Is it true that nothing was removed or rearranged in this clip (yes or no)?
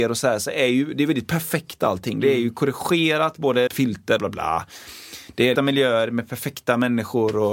no